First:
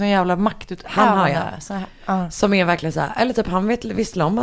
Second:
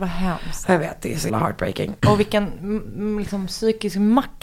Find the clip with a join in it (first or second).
second